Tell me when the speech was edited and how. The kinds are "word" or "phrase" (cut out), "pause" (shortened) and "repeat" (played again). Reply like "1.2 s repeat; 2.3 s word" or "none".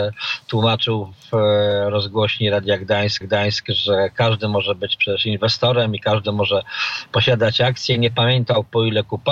3.2 s repeat